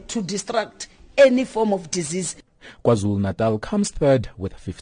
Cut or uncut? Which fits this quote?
uncut